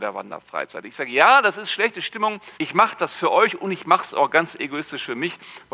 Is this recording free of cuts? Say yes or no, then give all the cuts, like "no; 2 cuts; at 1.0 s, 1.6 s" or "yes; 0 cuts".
no; 1 cut; at 2.5 s